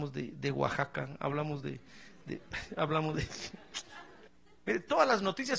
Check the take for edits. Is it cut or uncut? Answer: uncut